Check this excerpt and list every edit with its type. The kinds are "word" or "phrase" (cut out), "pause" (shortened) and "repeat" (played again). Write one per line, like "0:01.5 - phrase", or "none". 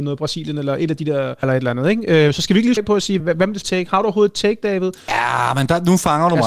0:01.4 - word
0:02.8 - word
0:03.2 - word
0:03.6 - word